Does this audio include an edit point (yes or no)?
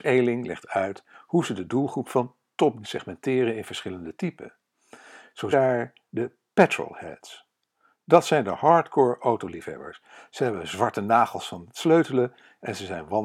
yes